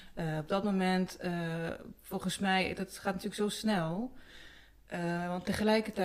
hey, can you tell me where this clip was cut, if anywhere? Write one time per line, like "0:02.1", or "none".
none